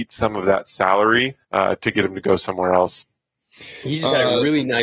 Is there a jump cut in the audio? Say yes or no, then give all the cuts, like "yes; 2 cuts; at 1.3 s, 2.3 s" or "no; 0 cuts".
yes; 1 cut; at 1.4 s